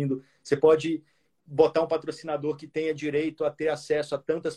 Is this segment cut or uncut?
uncut